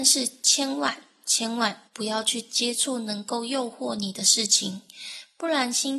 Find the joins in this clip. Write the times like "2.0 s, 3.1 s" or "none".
1.9 s